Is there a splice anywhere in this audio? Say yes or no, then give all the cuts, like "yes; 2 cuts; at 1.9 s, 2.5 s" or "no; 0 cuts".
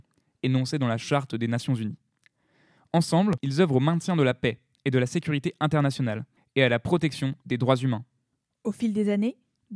no; 0 cuts